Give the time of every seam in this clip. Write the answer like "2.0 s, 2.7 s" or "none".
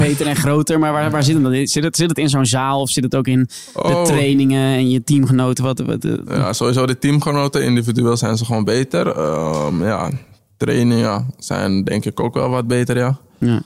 none